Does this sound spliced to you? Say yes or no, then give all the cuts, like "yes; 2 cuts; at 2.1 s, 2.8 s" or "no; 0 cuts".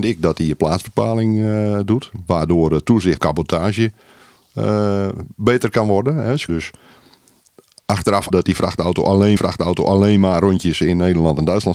yes; 4 cuts; at 3.2 s, 6.5 s, 8.3 s, 9.4 s